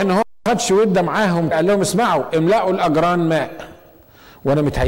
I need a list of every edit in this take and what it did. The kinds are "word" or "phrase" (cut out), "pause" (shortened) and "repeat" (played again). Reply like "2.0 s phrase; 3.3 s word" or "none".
1.5 s word